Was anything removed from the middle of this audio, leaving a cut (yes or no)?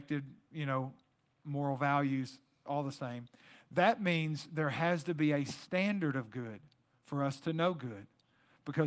no